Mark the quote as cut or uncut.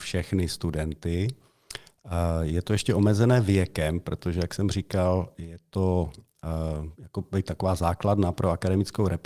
uncut